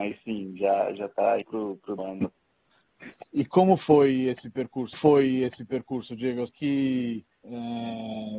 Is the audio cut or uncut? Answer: cut